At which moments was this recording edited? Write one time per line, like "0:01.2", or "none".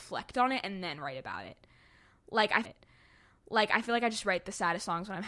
0:02.6